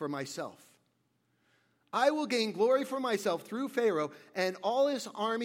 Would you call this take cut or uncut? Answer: uncut